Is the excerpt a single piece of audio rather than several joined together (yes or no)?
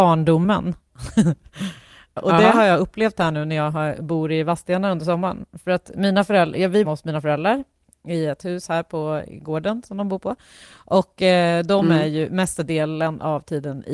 no